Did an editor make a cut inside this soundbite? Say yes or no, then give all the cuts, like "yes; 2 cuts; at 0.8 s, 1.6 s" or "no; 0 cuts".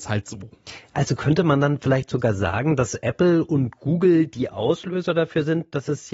no; 0 cuts